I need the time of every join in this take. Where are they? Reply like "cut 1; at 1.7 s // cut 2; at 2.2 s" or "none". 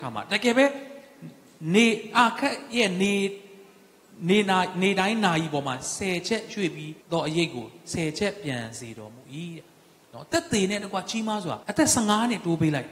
cut 1; at 7.0 s // cut 2; at 11.6 s